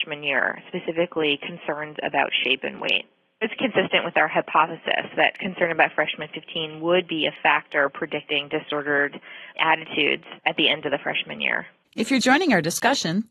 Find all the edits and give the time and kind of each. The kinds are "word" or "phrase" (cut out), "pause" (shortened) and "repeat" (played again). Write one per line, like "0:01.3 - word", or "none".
0:03.6 - word
0:10.4 - pause
0:12.2 - word